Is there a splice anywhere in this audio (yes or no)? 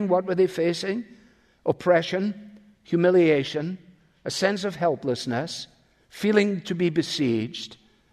no